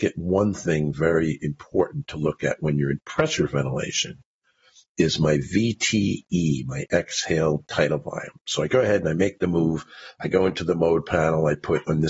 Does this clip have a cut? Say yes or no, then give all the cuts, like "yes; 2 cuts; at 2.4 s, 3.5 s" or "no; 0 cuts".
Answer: no; 0 cuts